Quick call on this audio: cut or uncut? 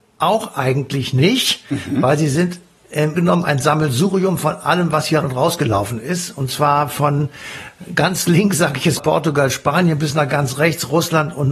cut